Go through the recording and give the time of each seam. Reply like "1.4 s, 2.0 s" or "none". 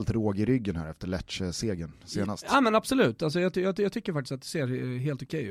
none